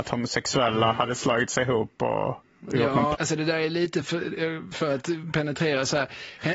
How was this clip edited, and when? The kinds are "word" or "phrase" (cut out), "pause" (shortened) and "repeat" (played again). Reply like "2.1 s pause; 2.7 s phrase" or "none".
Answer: 3.1 s word; 4.0 s word; 4.7 s phrase